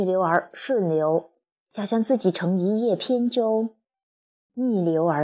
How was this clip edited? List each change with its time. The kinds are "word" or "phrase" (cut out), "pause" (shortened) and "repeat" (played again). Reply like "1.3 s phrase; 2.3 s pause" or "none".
none